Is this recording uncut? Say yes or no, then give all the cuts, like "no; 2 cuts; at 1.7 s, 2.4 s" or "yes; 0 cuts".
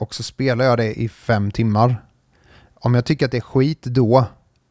yes; 0 cuts